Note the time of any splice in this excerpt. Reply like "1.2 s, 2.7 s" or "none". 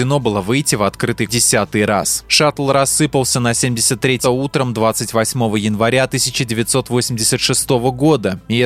1.3 s, 4.2 s

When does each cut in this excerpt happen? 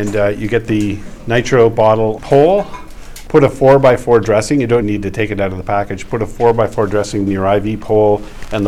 2.2 s, 3.3 s, 4.8 s, 7.3 s

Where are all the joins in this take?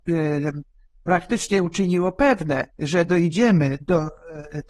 2.7 s

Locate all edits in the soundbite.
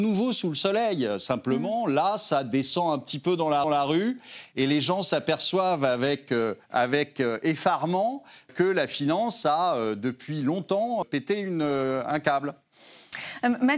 3.6 s, 6.6 s, 8.5 s, 11.0 s

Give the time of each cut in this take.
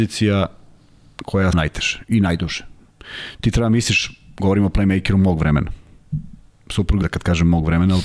1.5 s, 7.0 s

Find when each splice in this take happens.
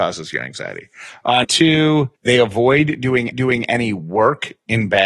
1.4 s, 2.2 s, 3.3 s

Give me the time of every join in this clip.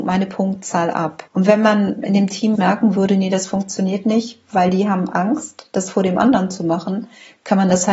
1.3 s, 2.5 s

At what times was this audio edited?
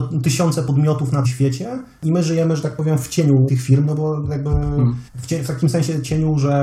1.2 s, 3.5 s, 5.1 s

